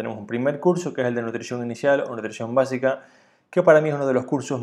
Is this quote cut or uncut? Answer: uncut